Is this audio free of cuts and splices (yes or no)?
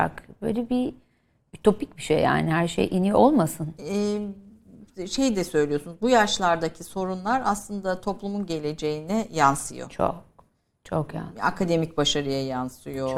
yes